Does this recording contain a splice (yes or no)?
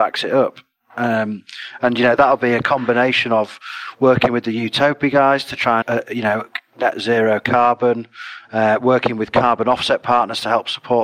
yes